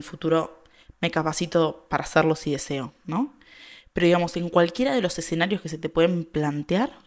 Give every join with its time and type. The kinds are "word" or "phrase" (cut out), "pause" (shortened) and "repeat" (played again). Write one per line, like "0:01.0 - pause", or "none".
none